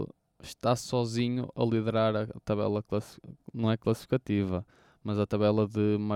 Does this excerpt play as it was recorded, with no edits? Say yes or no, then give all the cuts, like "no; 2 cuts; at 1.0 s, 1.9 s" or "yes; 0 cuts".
yes; 0 cuts